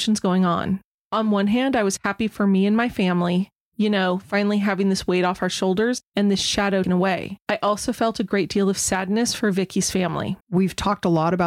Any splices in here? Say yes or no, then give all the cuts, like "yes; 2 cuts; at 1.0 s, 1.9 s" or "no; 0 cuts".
yes; 3 cuts; at 6.8 s, 7.4 s, 10.4 s